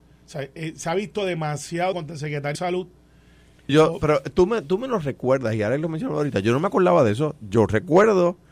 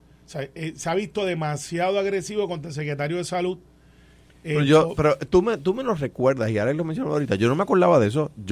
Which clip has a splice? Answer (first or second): first